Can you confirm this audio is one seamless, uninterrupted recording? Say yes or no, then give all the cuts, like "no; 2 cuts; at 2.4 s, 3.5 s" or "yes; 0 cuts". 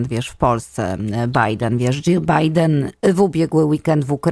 yes; 0 cuts